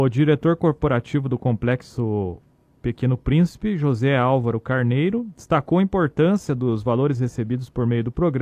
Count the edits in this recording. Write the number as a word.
zero